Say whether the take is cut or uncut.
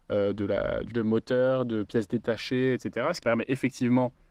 cut